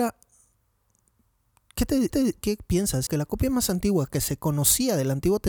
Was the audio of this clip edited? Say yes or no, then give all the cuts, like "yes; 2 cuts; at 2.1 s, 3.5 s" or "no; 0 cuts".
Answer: yes; 2 cuts; at 2.1 s, 3.1 s